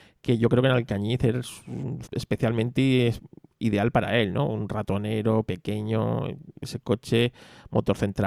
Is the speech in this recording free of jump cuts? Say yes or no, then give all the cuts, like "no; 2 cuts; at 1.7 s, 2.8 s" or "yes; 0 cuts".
no; 1 cut; at 2.0 s